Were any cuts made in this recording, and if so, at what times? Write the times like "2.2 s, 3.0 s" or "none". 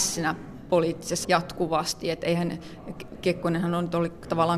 1.2 s